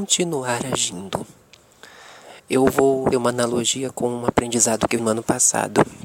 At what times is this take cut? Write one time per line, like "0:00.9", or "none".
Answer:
0:02.4
0:03.1
0:05.0